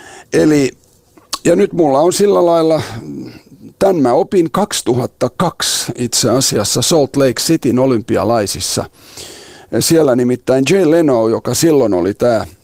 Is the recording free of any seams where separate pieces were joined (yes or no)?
yes